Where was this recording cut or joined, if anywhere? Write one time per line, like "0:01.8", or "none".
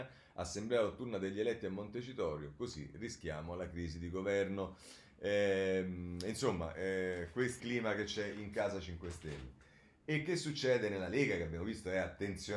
0:07.6